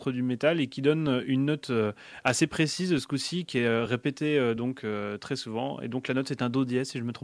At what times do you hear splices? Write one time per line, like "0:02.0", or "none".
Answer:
none